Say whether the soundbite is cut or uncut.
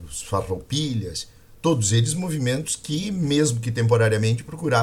uncut